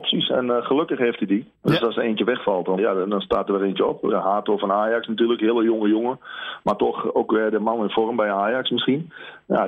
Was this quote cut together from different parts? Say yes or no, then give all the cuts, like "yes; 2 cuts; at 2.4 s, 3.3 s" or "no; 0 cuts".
yes; 2 cuts; at 1.5 s, 2.8 s